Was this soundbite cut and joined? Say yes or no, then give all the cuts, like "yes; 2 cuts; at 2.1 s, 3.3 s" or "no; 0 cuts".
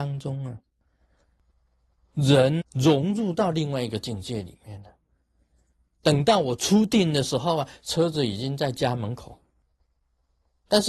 yes; 1 cut; at 2.6 s